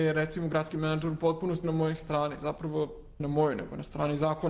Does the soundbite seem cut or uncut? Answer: cut